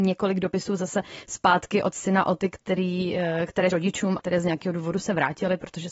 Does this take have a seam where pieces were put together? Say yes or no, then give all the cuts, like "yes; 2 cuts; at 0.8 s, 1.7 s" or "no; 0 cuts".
yes; 2 cuts; at 3.7 s, 4.2 s